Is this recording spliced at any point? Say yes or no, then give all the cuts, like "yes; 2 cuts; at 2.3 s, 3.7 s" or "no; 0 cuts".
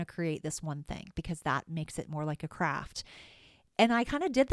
no; 0 cuts